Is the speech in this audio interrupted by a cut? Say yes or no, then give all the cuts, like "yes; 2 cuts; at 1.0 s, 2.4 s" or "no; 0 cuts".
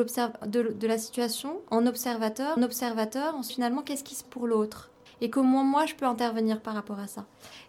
yes; 4 cuts; at 2.6 s, 3.5 s, 4.2 s, 5.1 s